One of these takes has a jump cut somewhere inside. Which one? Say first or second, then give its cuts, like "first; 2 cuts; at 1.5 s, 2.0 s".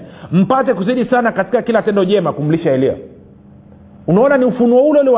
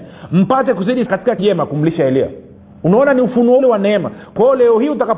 second; 4 cuts; at 1.1 s, 1.4 s, 2.6 s, 3.6 s